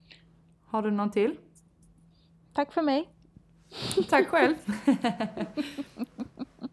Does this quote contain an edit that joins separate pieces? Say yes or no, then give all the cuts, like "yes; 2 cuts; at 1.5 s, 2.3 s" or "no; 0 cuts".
no; 0 cuts